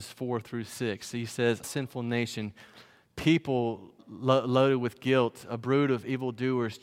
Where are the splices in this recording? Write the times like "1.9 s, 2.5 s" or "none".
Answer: 1.6 s, 4.0 s